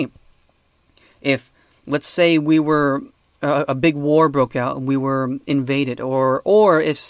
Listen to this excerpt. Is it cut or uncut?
uncut